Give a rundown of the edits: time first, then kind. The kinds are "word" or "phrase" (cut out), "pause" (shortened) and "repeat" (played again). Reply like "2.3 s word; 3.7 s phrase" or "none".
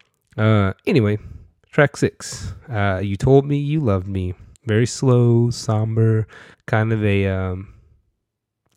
4.5 s pause; 6.5 s pause